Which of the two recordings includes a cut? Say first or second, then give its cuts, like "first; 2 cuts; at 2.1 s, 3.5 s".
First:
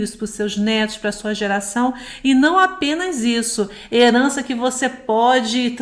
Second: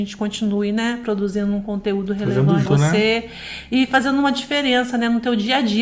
second; 1 cut; at 2.7 s